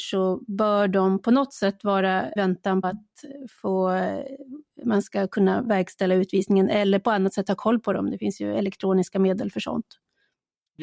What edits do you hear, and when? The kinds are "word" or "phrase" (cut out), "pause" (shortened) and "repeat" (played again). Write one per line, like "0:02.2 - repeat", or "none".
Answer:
0:02.4 - phrase
0:02.8 - word